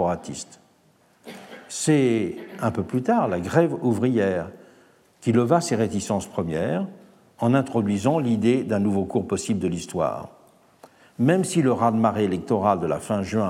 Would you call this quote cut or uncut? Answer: uncut